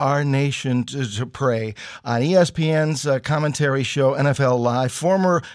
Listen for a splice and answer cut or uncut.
uncut